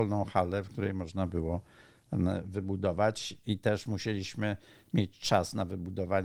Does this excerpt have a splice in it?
no; 0 cuts

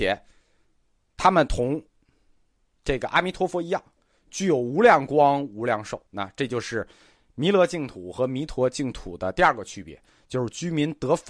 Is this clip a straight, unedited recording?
no; 1 cut; at 6.1 s

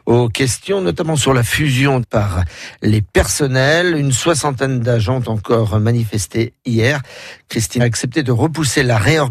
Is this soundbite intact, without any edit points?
no; 2 cuts; at 2.0 s, 7.8 s

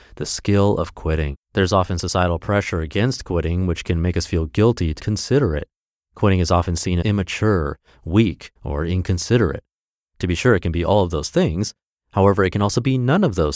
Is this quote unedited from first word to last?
no; 4 cuts; at 1.4 s, 5.0 s, 7.0 s, 8.6 s

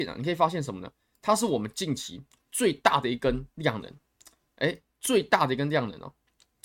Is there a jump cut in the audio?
no; 0 cuts

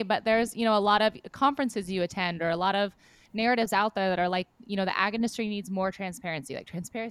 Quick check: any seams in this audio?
no; 0 cuts

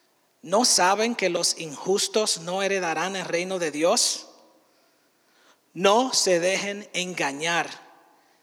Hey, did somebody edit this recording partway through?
no; 0 cuts

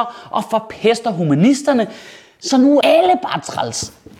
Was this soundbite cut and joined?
yes; 1 cut; at 2.8 s

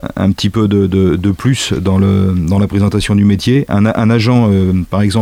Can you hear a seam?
no; 0 cuts

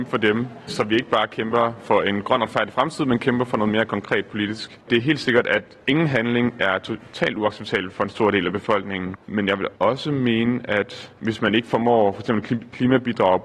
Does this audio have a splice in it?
yes; 4 cuts; at 4.8 s, 5.8 s, 9.2 s, 9.8 s

